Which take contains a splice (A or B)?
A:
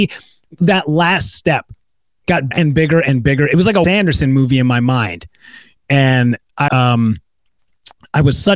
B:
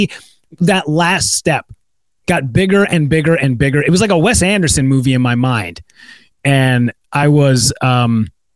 A